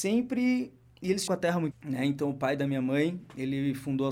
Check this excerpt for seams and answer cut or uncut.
cut